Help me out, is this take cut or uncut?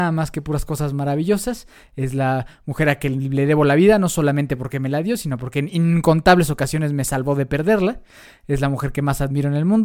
uncut